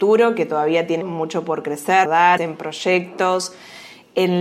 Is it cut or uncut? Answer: cut